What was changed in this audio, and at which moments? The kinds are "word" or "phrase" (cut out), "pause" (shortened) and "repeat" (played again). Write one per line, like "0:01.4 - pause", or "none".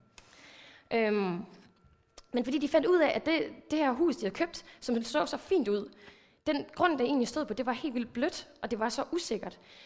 none